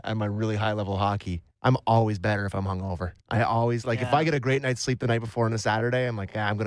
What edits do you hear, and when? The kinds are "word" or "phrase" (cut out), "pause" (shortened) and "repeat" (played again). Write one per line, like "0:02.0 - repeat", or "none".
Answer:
0:01.5 - pause
0:03.2 - pause